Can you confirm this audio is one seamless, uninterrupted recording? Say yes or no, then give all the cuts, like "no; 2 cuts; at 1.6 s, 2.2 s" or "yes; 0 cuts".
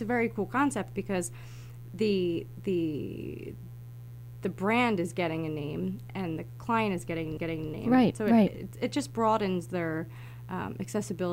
no; 1 cut; at 7.4 s